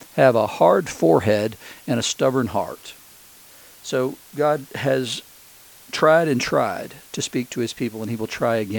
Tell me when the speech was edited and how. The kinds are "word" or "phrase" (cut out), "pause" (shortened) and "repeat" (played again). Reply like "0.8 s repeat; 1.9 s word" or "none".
4.2 s pause